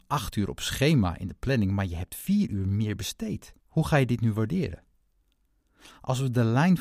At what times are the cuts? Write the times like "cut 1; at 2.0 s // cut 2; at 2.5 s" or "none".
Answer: cut 1; at 3.6 s